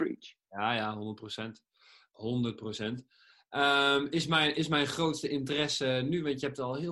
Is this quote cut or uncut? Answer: uncut